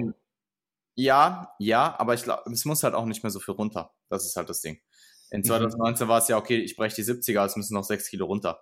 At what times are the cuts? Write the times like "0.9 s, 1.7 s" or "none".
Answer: none